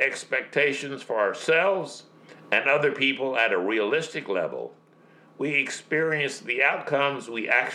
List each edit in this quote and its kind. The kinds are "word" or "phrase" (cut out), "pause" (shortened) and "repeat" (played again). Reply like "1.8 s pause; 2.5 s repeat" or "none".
none